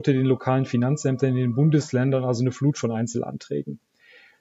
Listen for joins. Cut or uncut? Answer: uncut